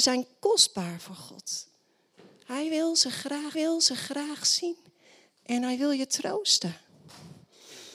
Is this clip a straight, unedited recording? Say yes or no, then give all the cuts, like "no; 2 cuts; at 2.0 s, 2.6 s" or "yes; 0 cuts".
no; 1 cut; at 3.5 s